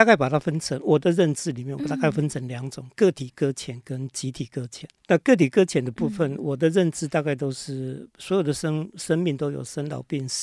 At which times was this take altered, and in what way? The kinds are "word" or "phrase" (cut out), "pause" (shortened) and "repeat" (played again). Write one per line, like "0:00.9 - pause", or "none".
0:05.0 - pause